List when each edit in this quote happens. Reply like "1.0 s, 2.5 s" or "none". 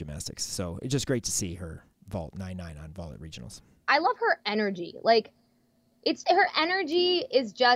6.2 s